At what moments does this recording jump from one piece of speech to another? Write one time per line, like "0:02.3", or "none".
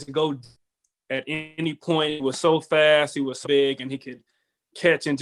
0:03.4